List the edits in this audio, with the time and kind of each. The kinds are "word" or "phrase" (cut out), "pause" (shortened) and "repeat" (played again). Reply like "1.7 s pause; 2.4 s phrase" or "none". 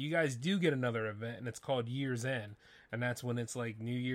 none